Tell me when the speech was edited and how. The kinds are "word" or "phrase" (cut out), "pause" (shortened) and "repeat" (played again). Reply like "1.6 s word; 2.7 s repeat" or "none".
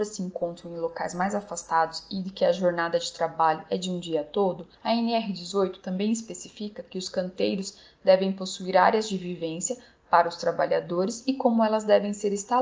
4.7 s pause